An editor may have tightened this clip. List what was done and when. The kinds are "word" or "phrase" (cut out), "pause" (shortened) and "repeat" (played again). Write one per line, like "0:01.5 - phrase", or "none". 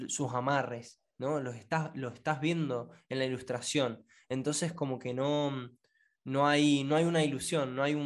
none